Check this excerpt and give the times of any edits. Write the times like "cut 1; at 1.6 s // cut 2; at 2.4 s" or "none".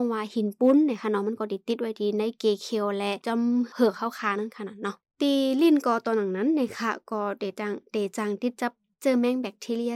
none